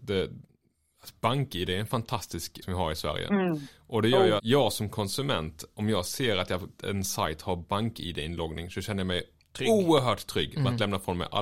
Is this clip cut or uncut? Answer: cut